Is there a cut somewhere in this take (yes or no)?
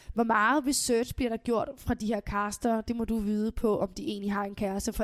no